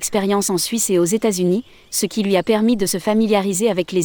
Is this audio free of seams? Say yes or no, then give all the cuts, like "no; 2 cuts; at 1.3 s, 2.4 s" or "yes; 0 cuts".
yes; 0 cuts